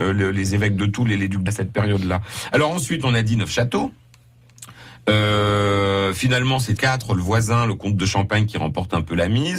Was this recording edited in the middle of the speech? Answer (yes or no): yes